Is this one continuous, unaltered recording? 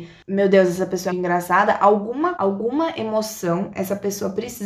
no; 2 cuts; at 1.1 s, 2.4 s

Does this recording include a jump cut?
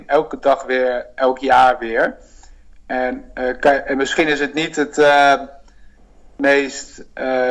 no; 0 cuts

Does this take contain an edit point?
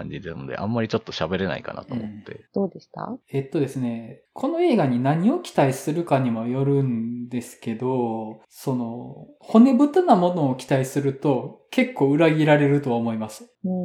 yes; 2 cuts; at 2.5 s, 3.2 s

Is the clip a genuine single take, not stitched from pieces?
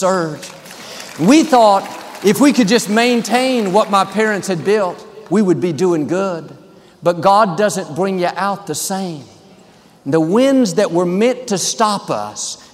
yes; 0 cuts

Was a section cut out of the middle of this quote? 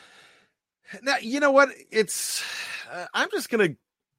no; 0 cuts

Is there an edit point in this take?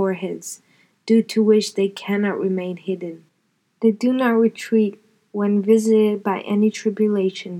no; 0 cuts

